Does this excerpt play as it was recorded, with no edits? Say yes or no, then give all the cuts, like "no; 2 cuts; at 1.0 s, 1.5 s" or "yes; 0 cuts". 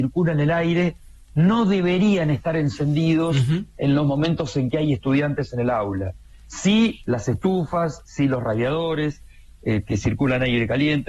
yes; 0 cuts